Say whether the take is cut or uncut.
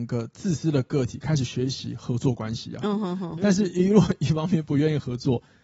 cut